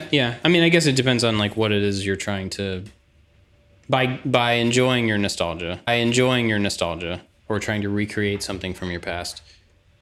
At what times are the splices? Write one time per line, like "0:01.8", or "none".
0:05.9